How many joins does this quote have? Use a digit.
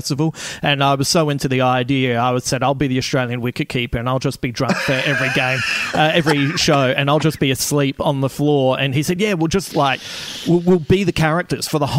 0